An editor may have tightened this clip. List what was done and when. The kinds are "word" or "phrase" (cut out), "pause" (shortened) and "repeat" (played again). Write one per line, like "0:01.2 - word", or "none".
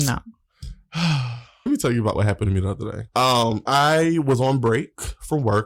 0:01.7 - word
0:03.7 - word